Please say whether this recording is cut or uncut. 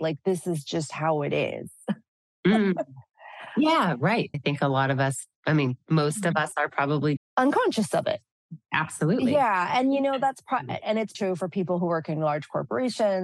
cut